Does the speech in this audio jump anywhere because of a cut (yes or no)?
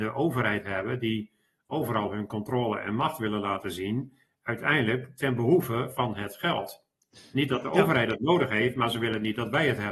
no